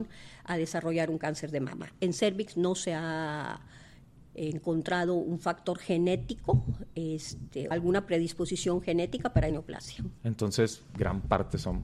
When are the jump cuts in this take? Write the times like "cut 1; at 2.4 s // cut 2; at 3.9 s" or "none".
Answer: cut 1; at 7.7 s // cut 2; at 9.5 s // cut 3; at 10.2 s